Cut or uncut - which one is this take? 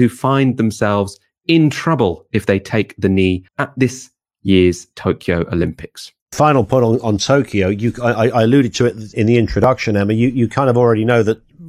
cut